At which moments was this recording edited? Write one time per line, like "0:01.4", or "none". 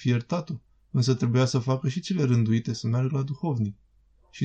none